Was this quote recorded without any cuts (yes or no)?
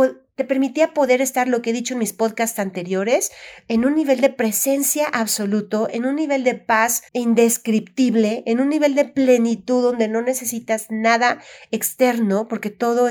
no